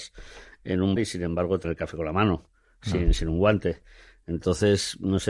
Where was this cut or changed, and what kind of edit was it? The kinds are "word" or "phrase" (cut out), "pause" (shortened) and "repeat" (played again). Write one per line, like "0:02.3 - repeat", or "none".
0:01.0 - word
0:01.6 - word